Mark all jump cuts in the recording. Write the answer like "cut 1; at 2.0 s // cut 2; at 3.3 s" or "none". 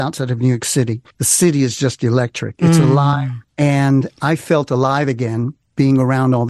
cut 1; at 1.1 s // cut 2; at 3.4 s